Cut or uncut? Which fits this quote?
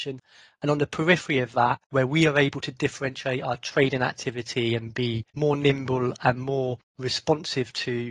cut